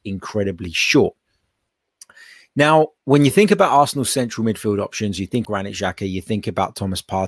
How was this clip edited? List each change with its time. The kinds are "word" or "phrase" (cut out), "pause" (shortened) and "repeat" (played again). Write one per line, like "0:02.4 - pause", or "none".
0:03.0 - pause
0:05.4 - word